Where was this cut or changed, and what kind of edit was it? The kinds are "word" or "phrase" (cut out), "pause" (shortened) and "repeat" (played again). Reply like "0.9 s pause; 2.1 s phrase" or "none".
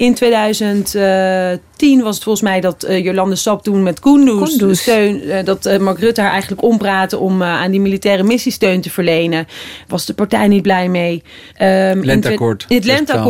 11.5 s pause